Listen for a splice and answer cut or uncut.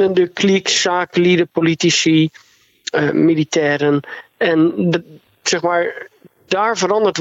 uncut